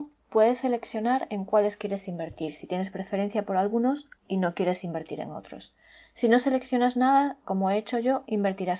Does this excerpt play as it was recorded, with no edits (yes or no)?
no